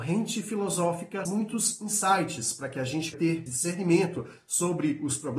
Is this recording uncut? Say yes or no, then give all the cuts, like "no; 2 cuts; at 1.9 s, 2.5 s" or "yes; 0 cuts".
no; 3 cuts; at 1.3 s, 3.1 s, 3.5 s